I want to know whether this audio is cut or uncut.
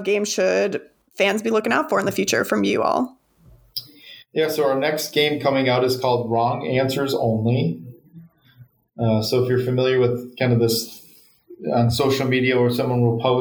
uncut